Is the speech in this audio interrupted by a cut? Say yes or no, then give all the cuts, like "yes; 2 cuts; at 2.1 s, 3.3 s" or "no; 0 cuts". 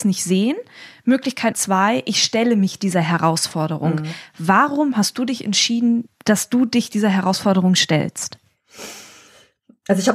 yes; 1 cut; at 1.5 s